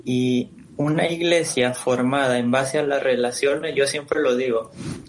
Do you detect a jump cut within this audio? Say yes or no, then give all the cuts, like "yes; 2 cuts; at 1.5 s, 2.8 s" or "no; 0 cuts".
no; 0 cuts